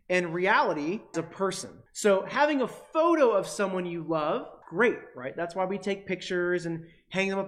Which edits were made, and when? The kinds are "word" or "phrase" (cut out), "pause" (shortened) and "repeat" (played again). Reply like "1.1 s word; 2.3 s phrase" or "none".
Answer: 1.1 s word; 1.9 s pause; 4.6 s word